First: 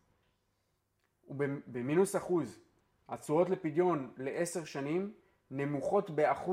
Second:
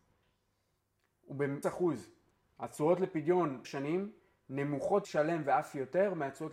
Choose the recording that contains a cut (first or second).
second